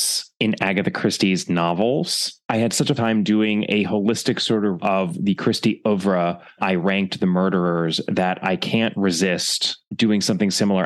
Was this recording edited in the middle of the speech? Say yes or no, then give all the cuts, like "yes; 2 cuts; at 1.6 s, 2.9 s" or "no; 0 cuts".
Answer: yes; 3 cuts; at 3.0 s, 4.8 s, 6.6 s